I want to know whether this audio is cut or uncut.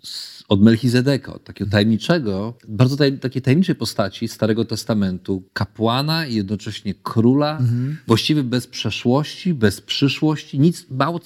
cut